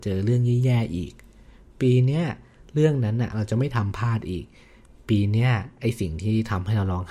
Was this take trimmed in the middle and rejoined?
no; 0 cuts

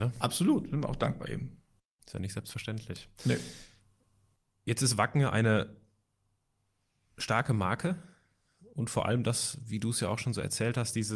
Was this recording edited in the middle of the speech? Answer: no; 0 cuts

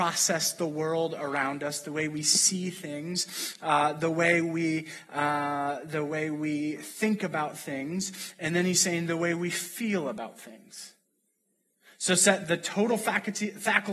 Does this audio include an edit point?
no; 0 cuts

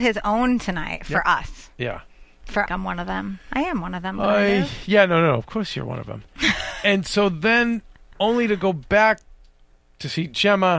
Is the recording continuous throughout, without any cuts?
no; 1 cut; at 2.7 s

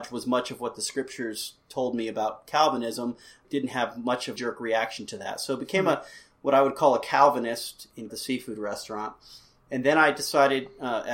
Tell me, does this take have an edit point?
yes; 3 cuts; at 3.4 s, 4.4 s, 8.1 s

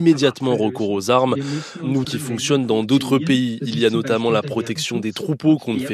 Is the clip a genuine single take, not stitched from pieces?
no; 1 cut; at 2.0 s

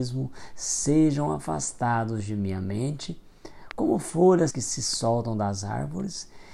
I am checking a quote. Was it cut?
yes; 1 cut; at 4.5 s

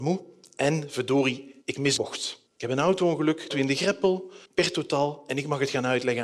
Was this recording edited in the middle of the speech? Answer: yes; 5 cuts; at 1.6 s, 2.0 s, 2.5 s, 3.5 s, 4.5 s

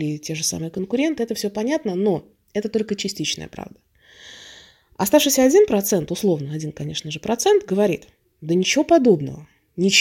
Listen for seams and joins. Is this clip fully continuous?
yes; 0 cuts

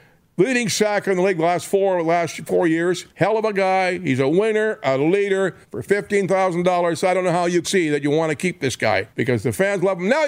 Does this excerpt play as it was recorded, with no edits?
no; 4 cuts; at 3.1 s, 5.6 s, 7.6 s, 9.1 s

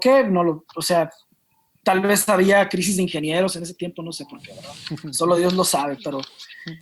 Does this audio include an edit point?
no; 0 cuts

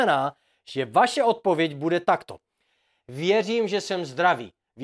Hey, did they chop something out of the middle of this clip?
no; 0 cuts

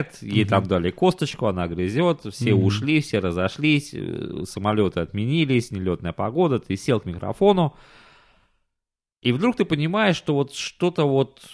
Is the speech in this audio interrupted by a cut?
no; 0 cuts

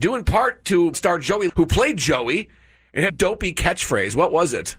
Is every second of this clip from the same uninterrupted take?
no; 3 cuts; at 0.9 s, 1.5 s, 3.1 s

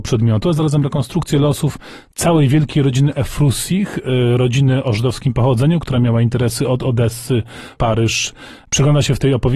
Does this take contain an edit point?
yes; 1 cut; at 7.8 s

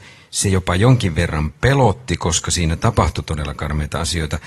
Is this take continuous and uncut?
yes; 0 cuts

